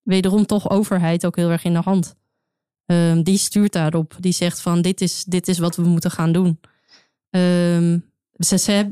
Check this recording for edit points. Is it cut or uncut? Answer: uncut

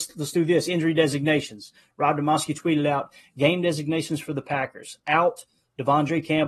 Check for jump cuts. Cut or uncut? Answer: uncut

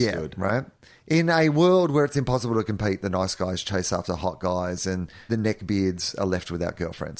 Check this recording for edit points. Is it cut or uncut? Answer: cut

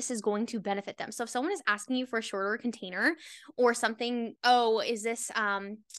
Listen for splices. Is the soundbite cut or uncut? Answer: cut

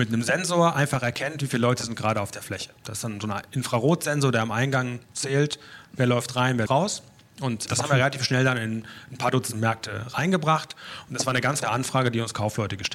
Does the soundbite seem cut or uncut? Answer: cut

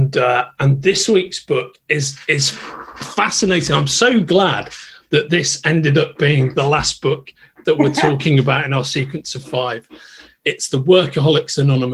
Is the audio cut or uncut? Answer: uncut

